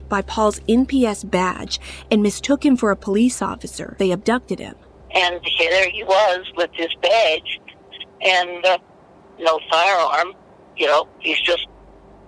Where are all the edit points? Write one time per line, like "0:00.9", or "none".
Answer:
0:04.0
0:04.9